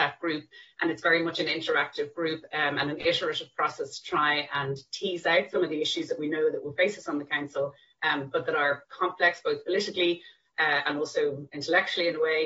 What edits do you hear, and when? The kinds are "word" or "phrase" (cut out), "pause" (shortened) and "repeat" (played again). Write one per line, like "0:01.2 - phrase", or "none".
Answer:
none